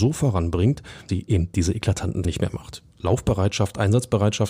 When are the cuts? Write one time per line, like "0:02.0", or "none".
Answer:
0:01.1
0:02.2